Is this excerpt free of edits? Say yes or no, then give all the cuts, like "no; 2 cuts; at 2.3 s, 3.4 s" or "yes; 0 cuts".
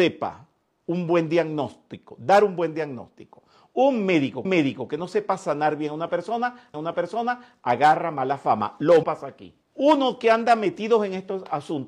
no; 4 cuts; at 4.4 s, 6.7 s, 9.0 s, 9.6 s